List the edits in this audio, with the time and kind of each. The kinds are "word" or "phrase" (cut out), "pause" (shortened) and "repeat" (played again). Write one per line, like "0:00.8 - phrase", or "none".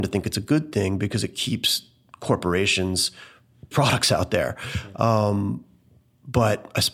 0:03.7 - phrase